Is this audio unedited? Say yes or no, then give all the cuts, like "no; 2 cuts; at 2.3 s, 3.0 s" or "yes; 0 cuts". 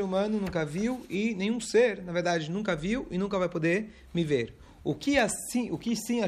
yes; 0 cuts